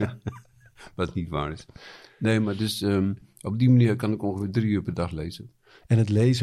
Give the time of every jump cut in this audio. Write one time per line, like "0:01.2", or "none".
none